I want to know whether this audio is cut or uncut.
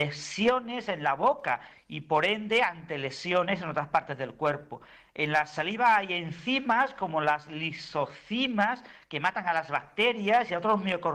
uncut